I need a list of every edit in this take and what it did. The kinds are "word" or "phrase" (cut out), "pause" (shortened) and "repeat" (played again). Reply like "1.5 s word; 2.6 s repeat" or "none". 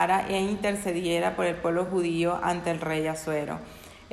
none